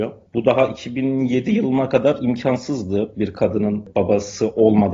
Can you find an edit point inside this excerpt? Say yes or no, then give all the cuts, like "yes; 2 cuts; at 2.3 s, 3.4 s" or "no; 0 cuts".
no; 0 cuts